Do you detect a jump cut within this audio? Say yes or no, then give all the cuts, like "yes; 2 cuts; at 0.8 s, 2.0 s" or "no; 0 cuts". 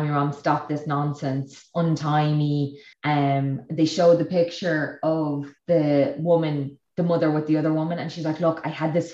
yes; 2 cuts; at 2.9 s, 5.6 s